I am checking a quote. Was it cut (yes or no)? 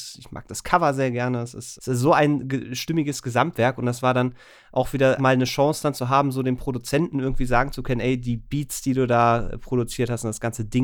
yes